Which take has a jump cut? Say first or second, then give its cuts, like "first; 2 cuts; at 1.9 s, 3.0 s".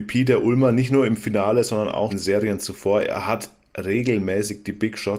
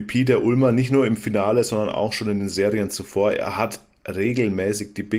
first; 1 cut; at 2.1 s